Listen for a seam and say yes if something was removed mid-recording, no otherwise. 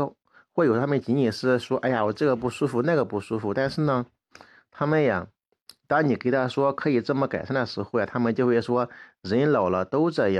no